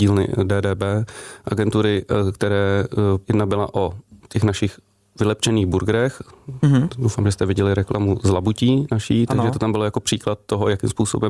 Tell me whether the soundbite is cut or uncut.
cut